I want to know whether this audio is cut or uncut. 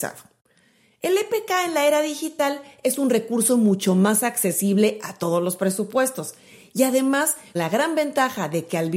cut